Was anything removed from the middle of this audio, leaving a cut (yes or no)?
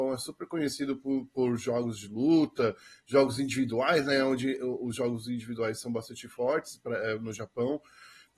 no